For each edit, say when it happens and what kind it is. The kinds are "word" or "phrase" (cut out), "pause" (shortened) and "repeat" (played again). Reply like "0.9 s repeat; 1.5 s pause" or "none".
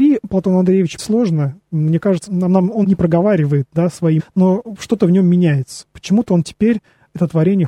1.0 s word; 2.3 s word; 2.8 s word; 4.2 s word